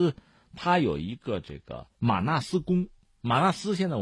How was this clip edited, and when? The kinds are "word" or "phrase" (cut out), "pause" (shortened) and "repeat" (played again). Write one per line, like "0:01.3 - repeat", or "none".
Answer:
0:01.9 - pause